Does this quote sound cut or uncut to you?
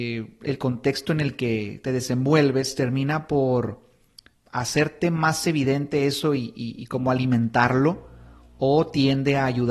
cut